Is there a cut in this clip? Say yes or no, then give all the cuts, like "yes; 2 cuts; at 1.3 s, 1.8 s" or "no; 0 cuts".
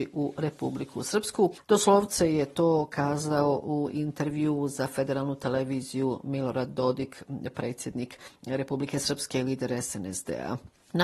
no; 0 cuts